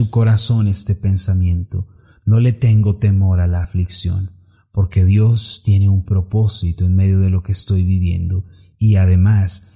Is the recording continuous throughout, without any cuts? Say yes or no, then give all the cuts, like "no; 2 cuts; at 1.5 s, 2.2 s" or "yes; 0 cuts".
yes; 0 cuts